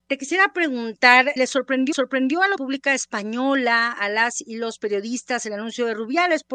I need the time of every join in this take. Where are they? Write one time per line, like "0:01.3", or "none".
0:01.4
0:01.9
0:02.6